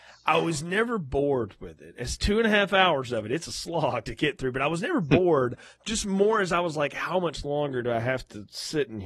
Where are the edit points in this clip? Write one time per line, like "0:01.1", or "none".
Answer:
none

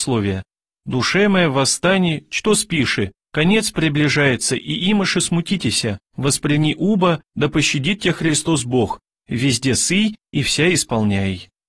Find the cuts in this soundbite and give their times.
0:06.1

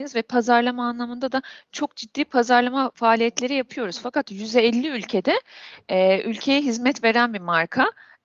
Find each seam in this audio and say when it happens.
none

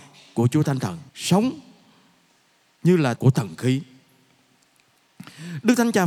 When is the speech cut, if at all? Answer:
0:01.1
0:03.2

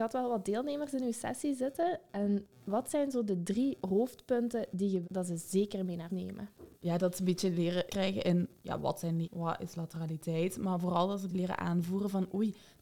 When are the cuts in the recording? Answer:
0:05.0
0:06.1
0:06.7
0:07.9
0:09.2
0:11.3

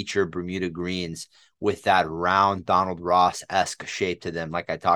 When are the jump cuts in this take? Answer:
none

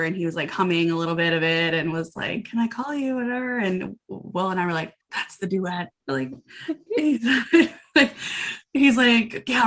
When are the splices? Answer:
0:05.0

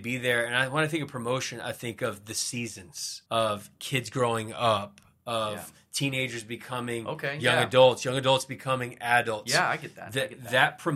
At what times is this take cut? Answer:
0:03.3

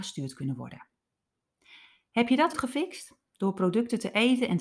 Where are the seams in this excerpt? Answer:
0:02.5

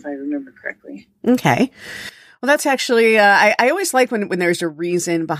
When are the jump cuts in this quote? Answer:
none

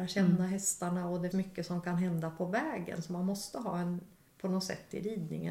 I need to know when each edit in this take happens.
0:01.3

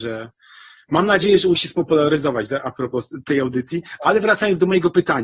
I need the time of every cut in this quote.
0:01.5

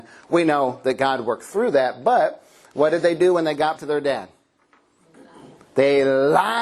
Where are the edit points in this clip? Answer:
0:03.8

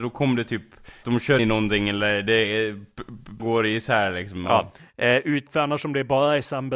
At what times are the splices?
0:01.0
0:01.4
0:03.4
0:05.5

